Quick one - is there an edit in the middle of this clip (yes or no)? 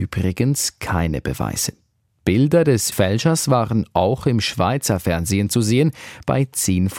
yes